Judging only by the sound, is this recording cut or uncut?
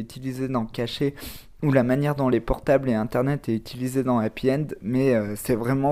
uncut